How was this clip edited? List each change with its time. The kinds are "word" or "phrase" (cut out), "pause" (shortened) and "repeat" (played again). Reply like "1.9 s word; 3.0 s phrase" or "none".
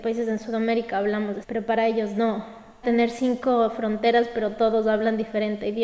1.4 s word; 2.8 s word